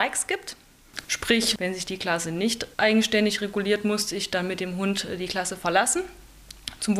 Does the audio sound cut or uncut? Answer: cut